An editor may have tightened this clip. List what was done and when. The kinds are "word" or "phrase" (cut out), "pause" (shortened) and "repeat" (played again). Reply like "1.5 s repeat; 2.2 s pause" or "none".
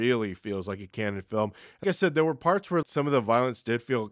1.8 s word; 2.8 s word